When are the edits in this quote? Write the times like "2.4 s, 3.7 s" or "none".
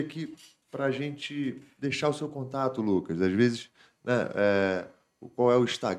none